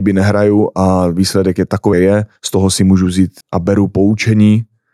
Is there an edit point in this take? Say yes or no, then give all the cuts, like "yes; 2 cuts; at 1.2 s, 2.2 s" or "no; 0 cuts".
yes; 3 cuts; at 1.9 s, 2.4 s, 3.4 s